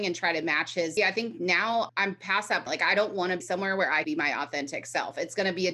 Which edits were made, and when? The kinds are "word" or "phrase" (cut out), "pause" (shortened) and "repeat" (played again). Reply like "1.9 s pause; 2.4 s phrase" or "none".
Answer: 1.0 s word; 1.9 s word; 2.7 s word; 3.4 s word; 4.0 s word